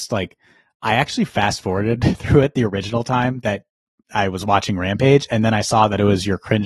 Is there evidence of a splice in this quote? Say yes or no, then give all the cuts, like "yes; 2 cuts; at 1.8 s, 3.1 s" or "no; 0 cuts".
no; 0 cuts